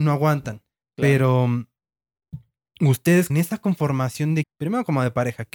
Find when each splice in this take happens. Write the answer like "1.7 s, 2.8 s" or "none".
3.3 s, 4.4 s